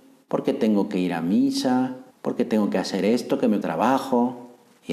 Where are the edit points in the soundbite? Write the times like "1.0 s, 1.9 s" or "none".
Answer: 2.1 s, 3.6 s